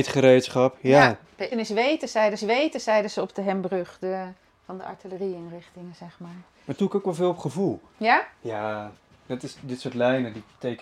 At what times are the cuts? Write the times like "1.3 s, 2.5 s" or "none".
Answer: 1.5 s, 2.4 s, 4.5 s, 6.8 s, 9.0 s